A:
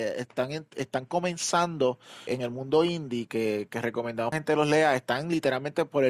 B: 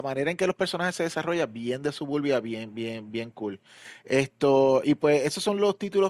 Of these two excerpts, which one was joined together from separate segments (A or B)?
A